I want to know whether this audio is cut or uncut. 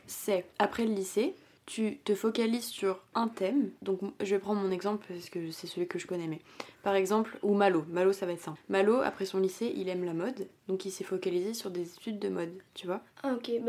uncut